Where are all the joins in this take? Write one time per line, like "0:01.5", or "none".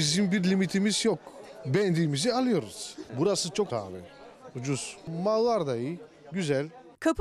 0:03.7

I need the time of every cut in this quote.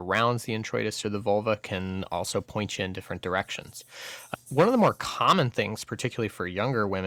none

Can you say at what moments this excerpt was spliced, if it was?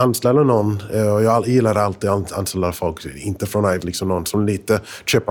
0:03.8

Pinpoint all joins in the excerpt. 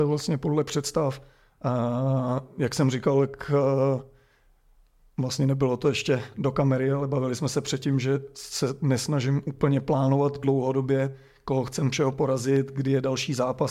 none

